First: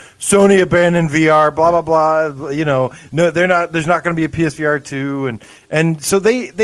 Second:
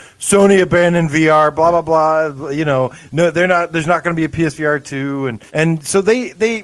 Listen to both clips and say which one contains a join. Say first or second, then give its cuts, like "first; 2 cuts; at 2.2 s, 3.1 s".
second; 1 cut; at 5.5 s